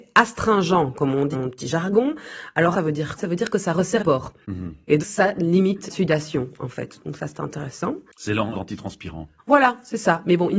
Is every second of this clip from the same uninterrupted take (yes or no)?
no